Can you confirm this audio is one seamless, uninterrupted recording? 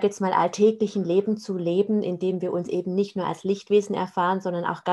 yes; 0 cuts

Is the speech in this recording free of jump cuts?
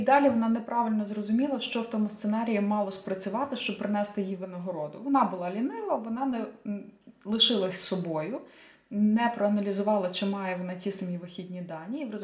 yes; 0 cuts

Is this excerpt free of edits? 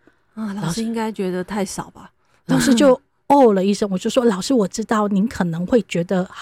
yes; 0 cuts

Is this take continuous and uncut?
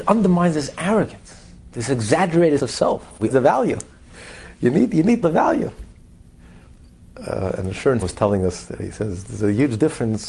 no; 4 cuts; at 2.6 s, 3.3 s, 5.2 s, 8.0 s

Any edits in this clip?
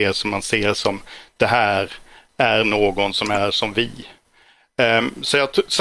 no; 0 cuts

